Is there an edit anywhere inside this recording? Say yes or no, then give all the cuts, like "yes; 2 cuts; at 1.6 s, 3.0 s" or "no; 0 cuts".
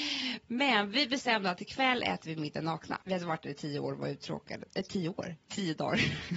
yes; 2 cuts; at 3.0 s, 4.7 s